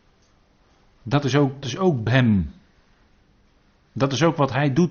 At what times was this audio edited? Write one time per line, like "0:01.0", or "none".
0:01.6
0:02.1